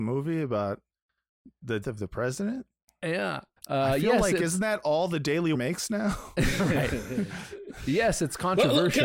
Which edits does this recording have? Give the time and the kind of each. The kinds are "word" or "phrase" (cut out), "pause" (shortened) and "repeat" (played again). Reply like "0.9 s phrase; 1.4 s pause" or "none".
1.8 s word; 3.6 s pause; 5.5 s word